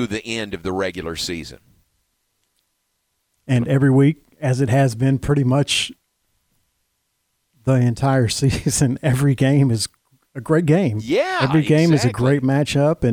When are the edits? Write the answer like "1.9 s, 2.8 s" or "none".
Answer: none